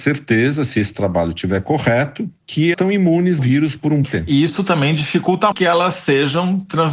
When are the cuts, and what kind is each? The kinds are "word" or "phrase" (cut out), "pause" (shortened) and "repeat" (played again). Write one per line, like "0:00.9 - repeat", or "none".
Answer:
0:02.7 - word
0:03.4 - word
0:04.0 - word
0:05.5 - word